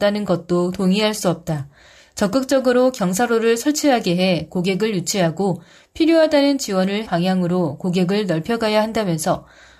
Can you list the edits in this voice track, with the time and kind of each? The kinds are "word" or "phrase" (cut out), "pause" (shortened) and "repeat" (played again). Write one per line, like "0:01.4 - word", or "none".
0:07.1 - word